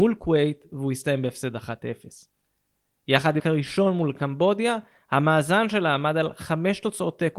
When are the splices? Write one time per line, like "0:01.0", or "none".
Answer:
0:03.4